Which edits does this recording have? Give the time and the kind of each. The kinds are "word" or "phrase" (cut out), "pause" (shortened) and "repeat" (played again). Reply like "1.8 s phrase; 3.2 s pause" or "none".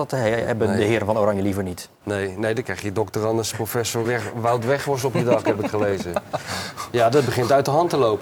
4.0 s word